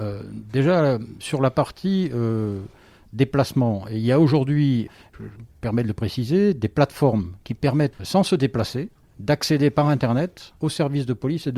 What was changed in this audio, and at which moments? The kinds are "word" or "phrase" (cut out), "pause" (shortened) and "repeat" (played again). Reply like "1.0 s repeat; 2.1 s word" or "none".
none